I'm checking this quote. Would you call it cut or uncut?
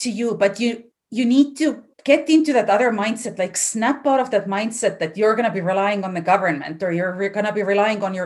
cut